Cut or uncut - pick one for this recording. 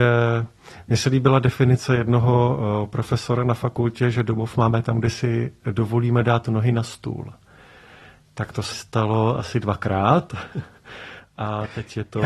cut